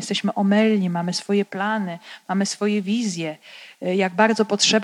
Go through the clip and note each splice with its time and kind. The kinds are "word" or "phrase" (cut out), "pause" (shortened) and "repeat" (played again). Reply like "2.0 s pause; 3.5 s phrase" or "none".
none